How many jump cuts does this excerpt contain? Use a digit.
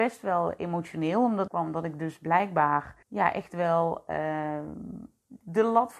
2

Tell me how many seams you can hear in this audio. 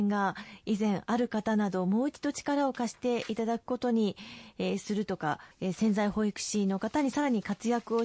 1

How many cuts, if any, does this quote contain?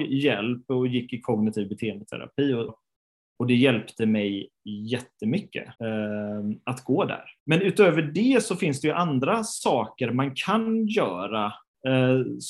3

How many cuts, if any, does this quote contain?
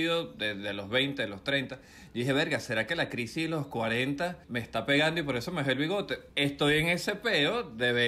2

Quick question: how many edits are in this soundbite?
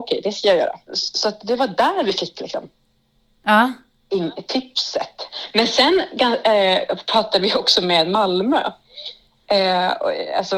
0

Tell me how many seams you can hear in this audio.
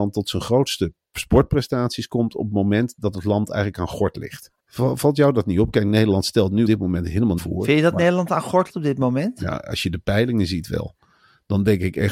4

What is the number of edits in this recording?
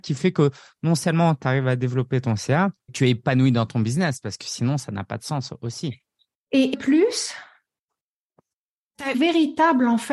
3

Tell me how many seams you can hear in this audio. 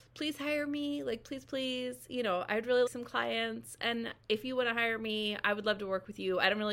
3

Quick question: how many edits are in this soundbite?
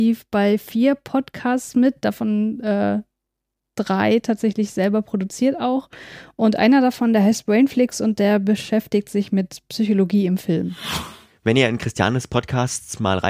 0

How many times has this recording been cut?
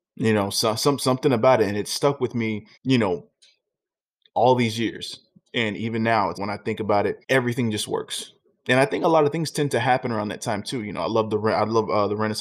3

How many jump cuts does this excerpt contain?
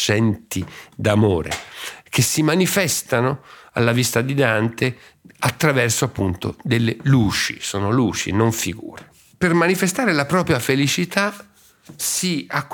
0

